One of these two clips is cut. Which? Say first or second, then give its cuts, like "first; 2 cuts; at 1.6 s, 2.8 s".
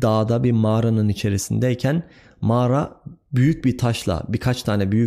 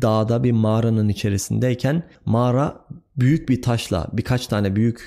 second; 1 cut; at 2.1 s